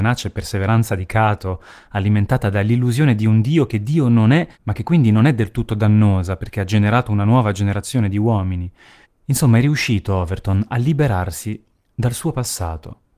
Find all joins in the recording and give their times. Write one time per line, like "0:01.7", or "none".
0:04.5
0:09.0
0:11.8

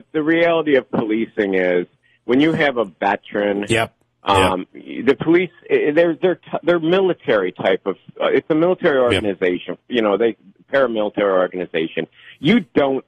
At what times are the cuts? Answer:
none

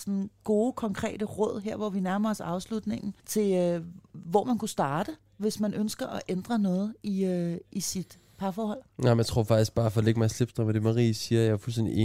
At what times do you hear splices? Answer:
0:03.2
0:08.9

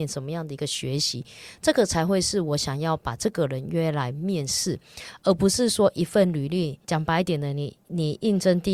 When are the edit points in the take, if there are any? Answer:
0:06.8

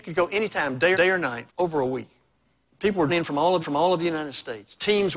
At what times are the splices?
0:00.9
0:01.5
0:02.3
0:03.1
0:03.6

